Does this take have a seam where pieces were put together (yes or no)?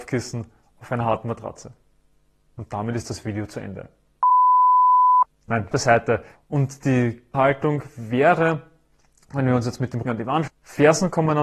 yes